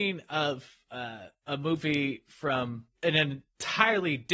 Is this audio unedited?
yes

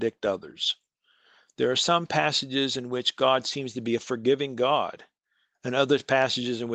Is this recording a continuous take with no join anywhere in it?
yes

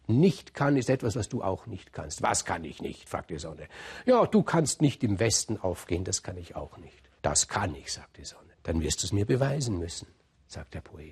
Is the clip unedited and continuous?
no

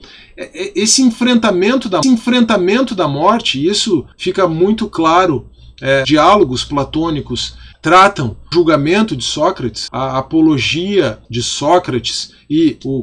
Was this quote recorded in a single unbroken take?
no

